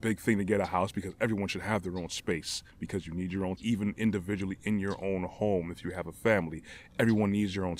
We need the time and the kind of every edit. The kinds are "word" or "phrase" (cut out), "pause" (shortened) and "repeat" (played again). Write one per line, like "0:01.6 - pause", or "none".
0:03.6 - word